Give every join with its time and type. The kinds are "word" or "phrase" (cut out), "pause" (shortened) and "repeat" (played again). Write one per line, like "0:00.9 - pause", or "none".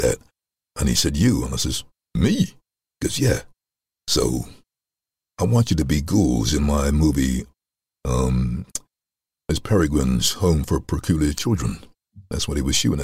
none